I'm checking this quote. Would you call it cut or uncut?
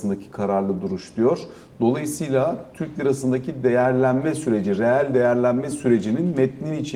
uncut